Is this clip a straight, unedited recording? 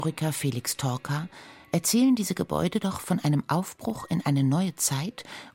yes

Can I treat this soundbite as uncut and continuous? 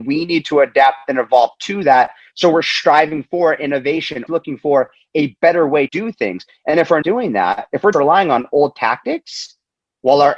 no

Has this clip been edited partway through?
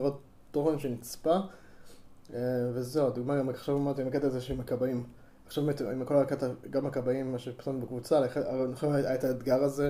yes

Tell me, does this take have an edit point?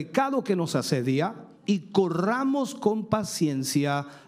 no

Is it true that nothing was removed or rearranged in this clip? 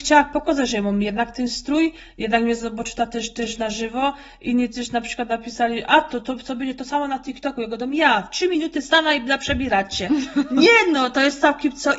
yes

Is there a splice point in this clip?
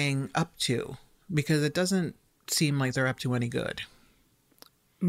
no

